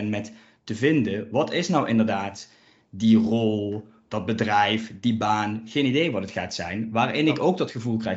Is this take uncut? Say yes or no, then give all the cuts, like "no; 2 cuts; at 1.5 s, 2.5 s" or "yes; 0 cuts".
yes; 0 cuts